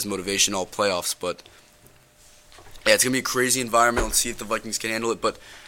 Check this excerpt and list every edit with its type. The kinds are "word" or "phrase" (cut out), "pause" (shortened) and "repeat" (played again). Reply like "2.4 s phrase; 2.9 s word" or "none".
none